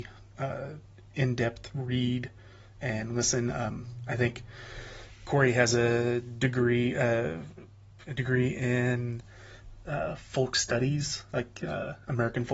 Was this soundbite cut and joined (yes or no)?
no